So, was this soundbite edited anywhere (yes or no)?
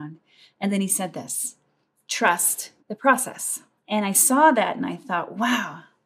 yes